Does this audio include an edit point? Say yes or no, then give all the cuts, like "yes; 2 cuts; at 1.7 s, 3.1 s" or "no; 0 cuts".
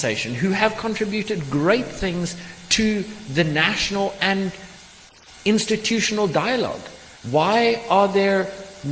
yes; 1 cut; at 7.2 s